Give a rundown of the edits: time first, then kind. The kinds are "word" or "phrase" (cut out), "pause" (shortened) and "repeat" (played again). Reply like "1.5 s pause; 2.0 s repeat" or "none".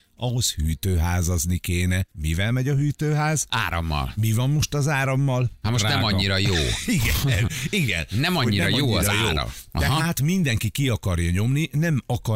2.1 s pause